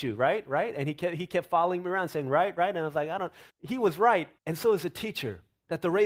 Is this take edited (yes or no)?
yes